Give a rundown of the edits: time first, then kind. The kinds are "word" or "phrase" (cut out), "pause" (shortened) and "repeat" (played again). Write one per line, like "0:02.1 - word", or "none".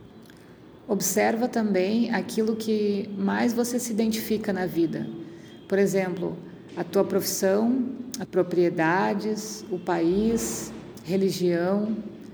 0:08.2 - phrase